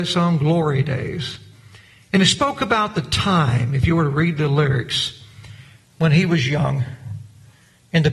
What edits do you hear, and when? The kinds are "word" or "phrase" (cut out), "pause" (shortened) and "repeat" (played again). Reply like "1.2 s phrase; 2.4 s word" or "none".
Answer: none